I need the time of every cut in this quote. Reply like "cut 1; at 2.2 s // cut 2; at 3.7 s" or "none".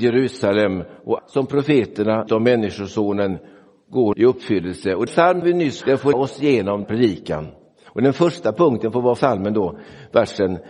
cut 1; at 1.2 s // cut 2; at 2.3 s // cut 3; at 4.1 s // cut 4; at 5.1 s // cut 5; at 5.4 s // cut 6; at 5.8 s // cut 7; at 6.1 s // cut 8; at 6.8 s // cut 9; at 9.2 s